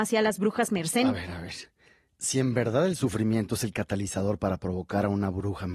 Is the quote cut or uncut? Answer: uncut